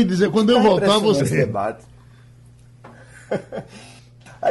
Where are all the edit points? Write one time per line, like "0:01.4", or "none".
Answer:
0:01.2